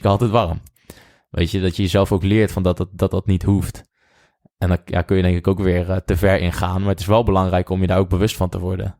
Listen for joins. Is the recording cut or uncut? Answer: uncut